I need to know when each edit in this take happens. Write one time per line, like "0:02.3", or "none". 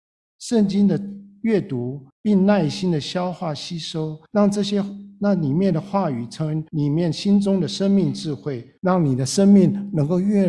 0:02.1
0:04.3
0:06.7
0:08.8